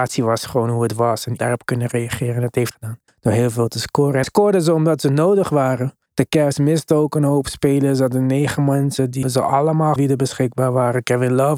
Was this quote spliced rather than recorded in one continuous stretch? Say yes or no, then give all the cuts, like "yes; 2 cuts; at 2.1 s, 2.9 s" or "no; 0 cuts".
yes; 7 cuts; at 1.4 s, 2.7 s, 3.1 s, 4.2 s, 6.1 s, 9.2 s, 10.0 s